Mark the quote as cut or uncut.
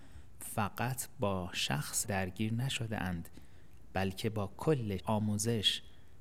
cut